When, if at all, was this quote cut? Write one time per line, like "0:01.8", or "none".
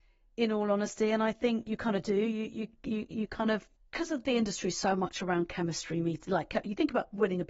0:03.8